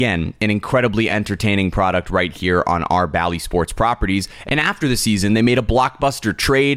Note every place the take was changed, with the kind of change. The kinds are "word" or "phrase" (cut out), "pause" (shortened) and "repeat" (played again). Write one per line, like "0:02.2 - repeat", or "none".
none